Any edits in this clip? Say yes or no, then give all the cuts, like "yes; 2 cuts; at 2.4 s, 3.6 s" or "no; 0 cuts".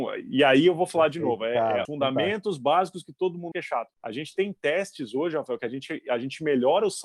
yes; 3 cuts; at 1.8 s, 3.5 s, 3.9 s